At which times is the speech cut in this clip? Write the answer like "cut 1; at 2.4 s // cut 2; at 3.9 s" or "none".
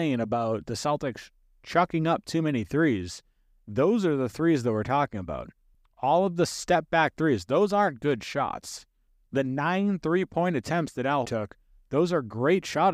cut 1; at 11.2 s

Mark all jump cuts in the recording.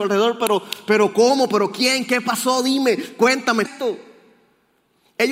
cut 1; at 3.6 s

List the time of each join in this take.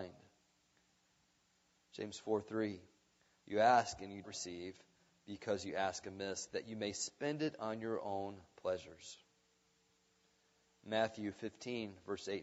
cut 1; at 4.2 s

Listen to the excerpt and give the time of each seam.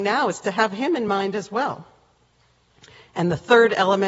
none

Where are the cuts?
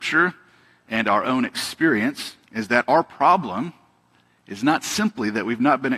cut 1; at 2.4 s

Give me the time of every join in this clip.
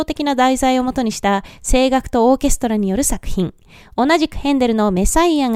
none

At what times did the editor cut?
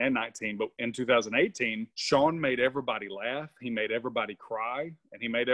cut 1; at 1.9 s

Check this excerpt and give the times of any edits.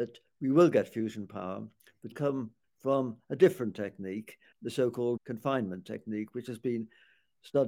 cut 1; at 2.1 s // cut 2; at 2.6 s // cut 3; at 4.5 s // cut 4; at 5.2 s

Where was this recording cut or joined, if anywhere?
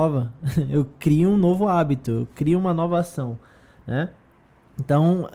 none

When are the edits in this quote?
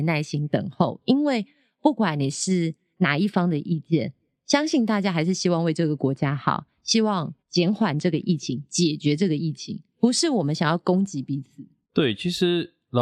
cut 1; at 7.4 s // cut 2; at 9.9 s

